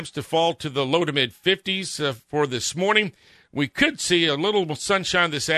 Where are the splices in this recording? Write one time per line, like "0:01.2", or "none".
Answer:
none